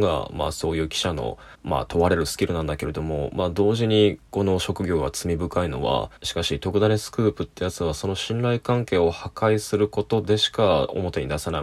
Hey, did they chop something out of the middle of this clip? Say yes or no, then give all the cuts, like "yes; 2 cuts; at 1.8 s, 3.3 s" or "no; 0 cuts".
yes; 2 cuts; at 1.5 s, 6.2 s